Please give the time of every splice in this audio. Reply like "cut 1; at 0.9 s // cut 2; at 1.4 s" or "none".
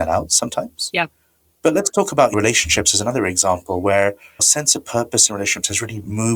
cut 1; at 4.4 s